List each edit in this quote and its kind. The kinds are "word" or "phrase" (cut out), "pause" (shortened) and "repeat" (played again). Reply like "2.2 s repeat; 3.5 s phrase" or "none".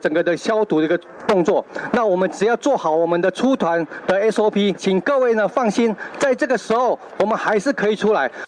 4.7 s word